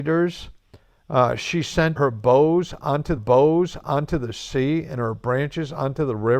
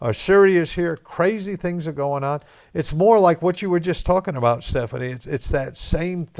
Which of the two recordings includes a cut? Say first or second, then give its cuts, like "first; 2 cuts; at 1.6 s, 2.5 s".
first; 2 cuts; at 2.0 s, 3.2 s